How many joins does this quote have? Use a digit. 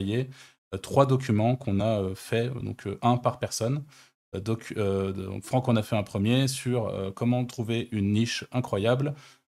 0